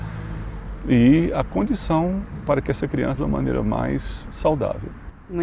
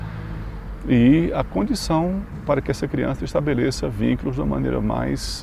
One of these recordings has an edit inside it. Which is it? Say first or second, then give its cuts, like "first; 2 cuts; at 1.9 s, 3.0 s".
first; 1 cut; at 3.2 s